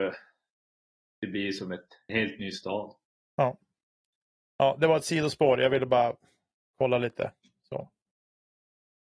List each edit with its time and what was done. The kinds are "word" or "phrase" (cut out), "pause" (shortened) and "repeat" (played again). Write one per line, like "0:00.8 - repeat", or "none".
0:02.1 - word